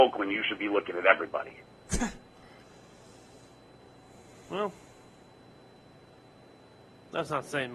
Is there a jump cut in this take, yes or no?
no